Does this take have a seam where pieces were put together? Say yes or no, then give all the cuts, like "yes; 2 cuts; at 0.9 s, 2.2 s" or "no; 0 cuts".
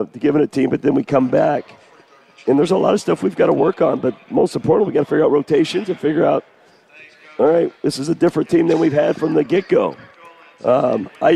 no; 0 cuts